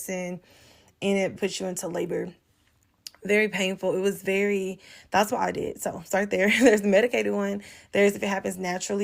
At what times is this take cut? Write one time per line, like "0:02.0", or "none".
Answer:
0:01.4